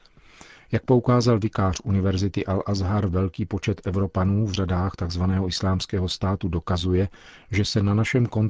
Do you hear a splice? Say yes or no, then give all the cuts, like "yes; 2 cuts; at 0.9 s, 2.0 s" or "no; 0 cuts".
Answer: no; 0 cuts